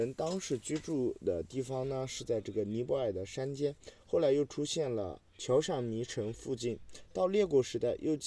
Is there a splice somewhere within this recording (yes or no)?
yes